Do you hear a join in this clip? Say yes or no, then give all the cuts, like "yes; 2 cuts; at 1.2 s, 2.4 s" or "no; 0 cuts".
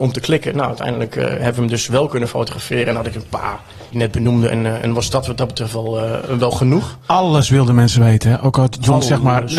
yes; 1 cut; at 3.9 s